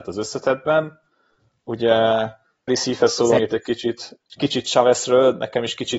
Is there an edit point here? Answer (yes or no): yes